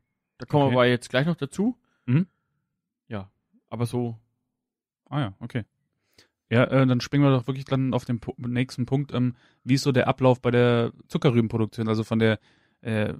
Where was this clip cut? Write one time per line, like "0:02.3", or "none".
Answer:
none

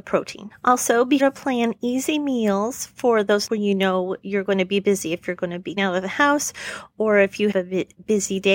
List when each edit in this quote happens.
0:01.2
0:03.5
0:05.8
0:07.5

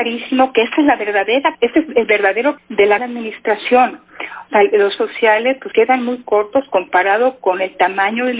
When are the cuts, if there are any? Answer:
0:01.5
0:02.6
0:03.0
0:05.0
0:05.7

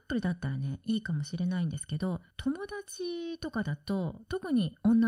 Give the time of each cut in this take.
0:02.3

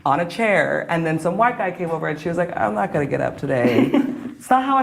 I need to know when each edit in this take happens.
none

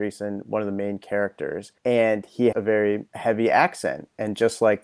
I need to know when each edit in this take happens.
0:01.8
0:02.5
0:03.1

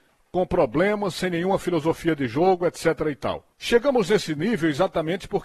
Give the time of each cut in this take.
0:03.5

